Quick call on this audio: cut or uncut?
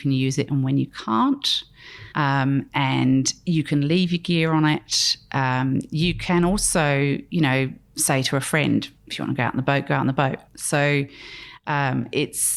cut